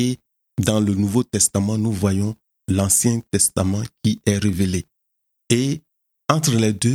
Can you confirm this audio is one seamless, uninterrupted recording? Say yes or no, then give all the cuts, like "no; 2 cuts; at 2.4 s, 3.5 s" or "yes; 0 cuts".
yes; 0 cuts